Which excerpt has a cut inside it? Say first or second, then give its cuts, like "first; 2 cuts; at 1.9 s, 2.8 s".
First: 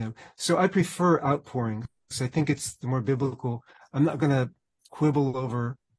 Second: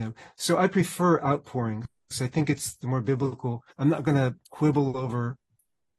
second; 2 cuts; at 3.7 s, 4.4 s